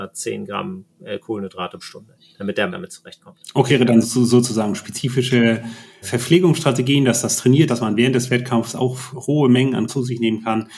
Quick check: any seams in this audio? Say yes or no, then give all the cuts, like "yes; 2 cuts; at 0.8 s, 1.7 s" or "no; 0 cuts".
yes; 8 cuts; at 1.8 s, 2.7 s, 3.7 s, 4.0 s, 6.0 s, 7.7 s, 9.1 s, 9.9 s